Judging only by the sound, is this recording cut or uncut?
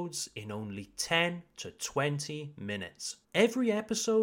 cut